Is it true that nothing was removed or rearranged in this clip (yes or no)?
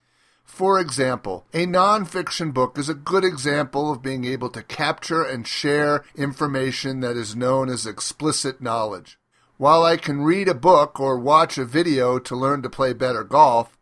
no